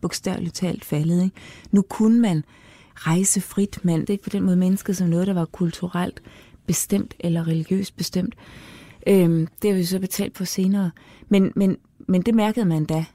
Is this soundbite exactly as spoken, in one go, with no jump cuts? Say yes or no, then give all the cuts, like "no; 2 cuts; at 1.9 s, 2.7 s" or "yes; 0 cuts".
no; 3 cuts; at 2.9 s, 4.0 s, 10.3 s